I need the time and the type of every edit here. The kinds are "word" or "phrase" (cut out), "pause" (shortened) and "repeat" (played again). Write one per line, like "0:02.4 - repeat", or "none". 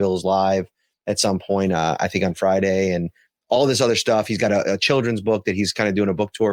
none